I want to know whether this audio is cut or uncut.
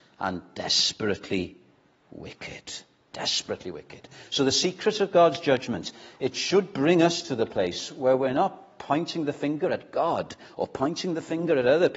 uncut